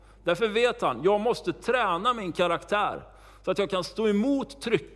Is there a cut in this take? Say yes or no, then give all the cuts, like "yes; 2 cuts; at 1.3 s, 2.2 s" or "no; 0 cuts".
no; 0 cuts